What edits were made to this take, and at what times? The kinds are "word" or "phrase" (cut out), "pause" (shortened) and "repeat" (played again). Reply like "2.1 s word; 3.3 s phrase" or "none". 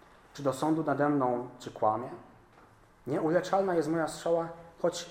none